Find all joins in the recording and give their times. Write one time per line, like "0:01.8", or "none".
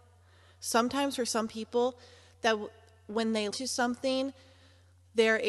0:03.5